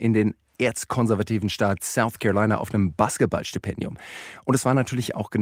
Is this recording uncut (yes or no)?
yes